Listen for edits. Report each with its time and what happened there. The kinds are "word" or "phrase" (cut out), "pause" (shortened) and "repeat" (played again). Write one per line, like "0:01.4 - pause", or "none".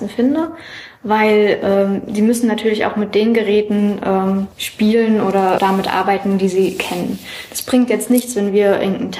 0:04.5 - pause
0:05.6 - word

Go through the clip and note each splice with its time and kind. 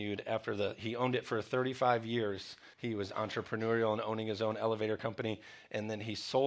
0:02.7 - pause

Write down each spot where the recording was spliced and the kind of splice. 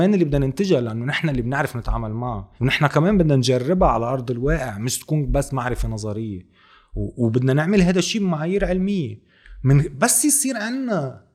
0:02.6 - pause

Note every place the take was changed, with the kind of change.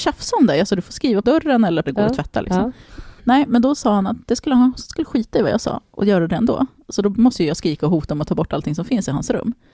0:01.2 - phrase
0:01.8 - phrase
0:03.2 - pause

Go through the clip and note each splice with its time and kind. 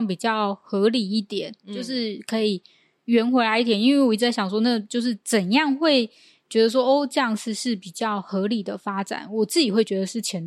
0:05.2 - pause

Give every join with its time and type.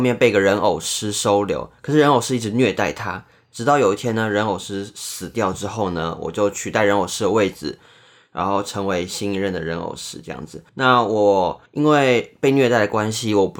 0:10.7 - pause
0:11.7 - pause

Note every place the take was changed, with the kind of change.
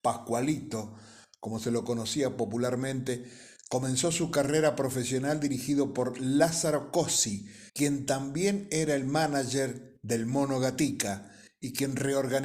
0:07.7 - pause

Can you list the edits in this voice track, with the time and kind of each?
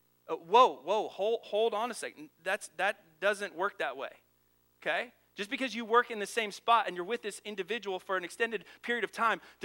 none

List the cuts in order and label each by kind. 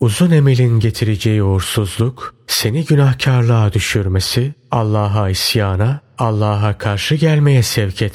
none

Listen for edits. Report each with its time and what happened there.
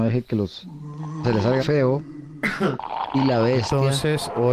0:01.2 - word
0:01.6 - word

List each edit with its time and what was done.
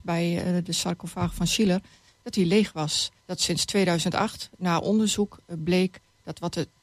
0:03.2 - pause

